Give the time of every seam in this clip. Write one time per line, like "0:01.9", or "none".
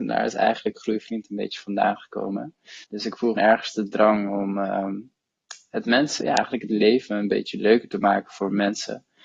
0:02.8
0:03.4
0:06.2

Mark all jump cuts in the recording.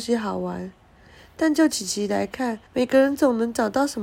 0:02.7

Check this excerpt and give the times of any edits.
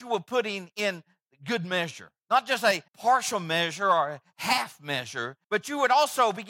0:02.2
0:02.9
0:05.4

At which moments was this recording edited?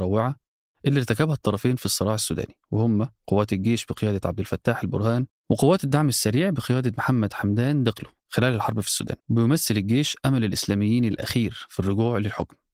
0:03.2
0:05.3
0:08.2
0:09.2

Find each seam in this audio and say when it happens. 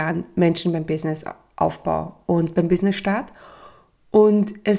none

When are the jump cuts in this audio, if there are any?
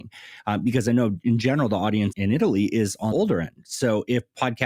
0:02.1
0:03.1

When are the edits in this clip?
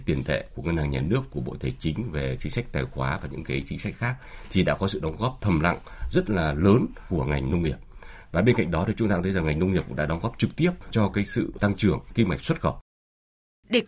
none

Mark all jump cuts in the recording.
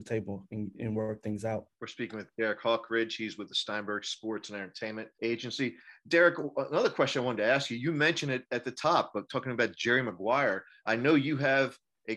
0:01.7
0:05.1

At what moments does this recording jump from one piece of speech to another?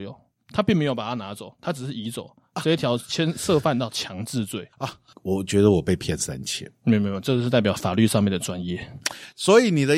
0:04.7

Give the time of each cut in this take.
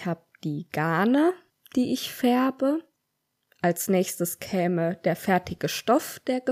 none

